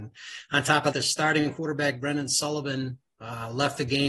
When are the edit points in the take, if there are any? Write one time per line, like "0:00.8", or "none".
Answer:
0:00.9